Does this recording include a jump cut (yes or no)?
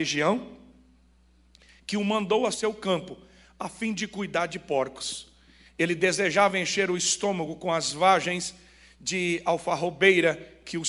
no